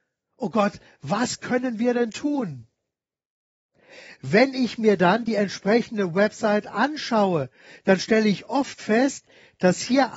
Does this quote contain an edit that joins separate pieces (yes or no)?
no